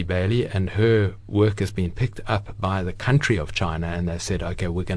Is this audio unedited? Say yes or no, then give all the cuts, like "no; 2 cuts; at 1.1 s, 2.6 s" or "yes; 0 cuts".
yes; 0 cuts